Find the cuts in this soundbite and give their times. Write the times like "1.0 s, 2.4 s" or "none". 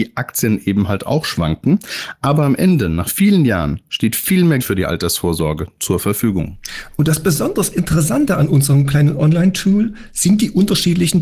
4.6 s